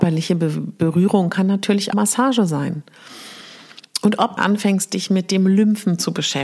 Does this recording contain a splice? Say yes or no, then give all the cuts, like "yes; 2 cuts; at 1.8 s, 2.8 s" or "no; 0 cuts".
yes; 2 cuts; at 1.9 s, 4.4 s